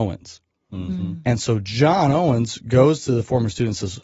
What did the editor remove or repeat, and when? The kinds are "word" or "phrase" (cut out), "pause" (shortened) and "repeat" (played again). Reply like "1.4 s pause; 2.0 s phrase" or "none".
none